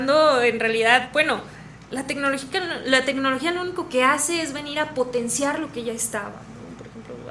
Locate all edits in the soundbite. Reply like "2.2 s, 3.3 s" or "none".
none

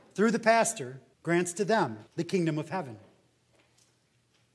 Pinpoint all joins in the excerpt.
1.1 s, 2.1 s

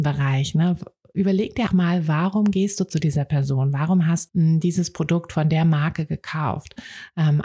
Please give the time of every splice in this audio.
1.7 s, 4.3 s

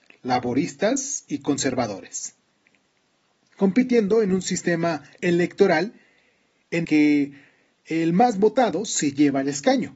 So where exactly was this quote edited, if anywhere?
6.8 s

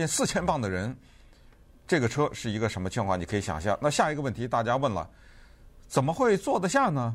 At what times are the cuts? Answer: none

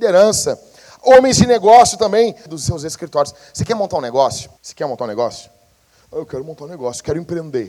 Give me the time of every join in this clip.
2.5 s, 4.6 s

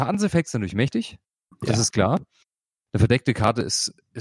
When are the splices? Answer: 1.9 s

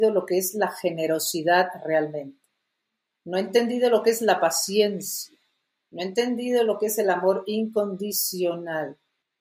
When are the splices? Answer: none

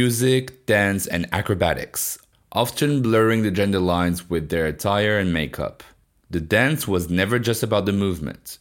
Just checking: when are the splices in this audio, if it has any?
none

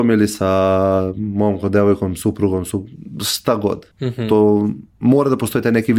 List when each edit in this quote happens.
3.9 s

